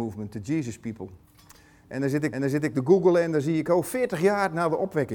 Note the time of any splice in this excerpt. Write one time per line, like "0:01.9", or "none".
0:02.3